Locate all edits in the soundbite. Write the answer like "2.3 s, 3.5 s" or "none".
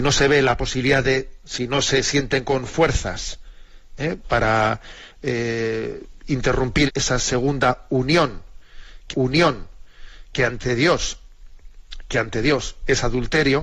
1.4 s, 4.2 s, 6.9 s, 9.1 s